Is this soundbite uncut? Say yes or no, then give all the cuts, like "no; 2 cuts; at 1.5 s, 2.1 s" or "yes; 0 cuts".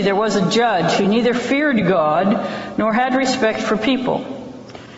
yes; 0 cuts